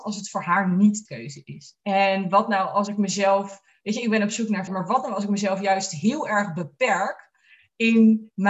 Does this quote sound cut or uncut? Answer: cut